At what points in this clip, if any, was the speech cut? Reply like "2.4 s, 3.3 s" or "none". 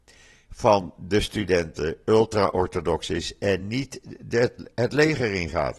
none